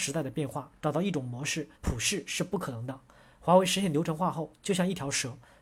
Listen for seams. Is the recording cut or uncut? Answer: cut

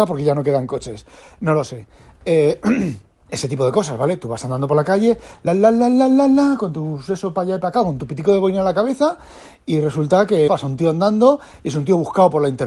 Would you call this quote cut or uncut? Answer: cut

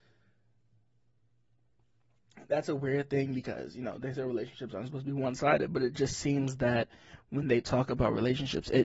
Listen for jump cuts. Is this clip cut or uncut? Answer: uncut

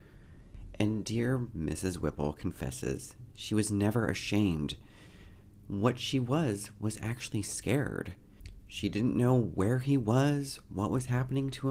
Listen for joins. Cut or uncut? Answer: uncut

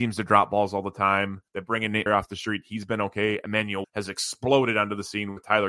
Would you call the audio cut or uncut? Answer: cut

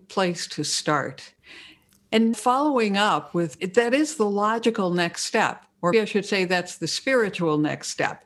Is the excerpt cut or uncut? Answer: cut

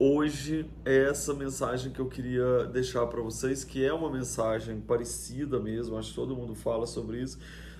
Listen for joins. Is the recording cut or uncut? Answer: uncut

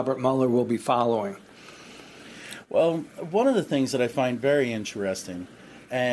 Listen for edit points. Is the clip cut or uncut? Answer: uncut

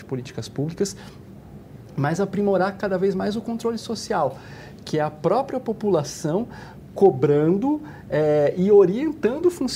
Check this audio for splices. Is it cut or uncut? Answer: uncut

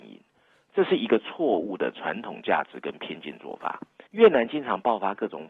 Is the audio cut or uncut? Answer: cut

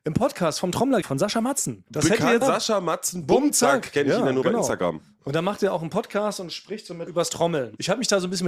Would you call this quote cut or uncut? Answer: cut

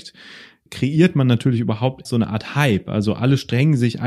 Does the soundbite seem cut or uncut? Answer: cut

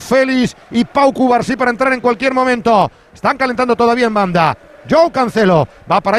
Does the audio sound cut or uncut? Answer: uncut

